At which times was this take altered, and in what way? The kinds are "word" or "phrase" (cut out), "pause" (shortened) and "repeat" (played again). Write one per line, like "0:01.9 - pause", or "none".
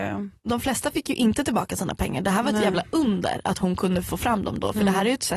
none